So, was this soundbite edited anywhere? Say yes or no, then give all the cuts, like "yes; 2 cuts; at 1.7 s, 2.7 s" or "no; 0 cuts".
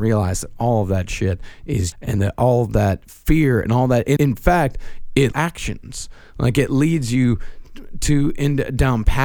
yes; 3 cuts; at 1.9 s, 4.2 s, 5.3 s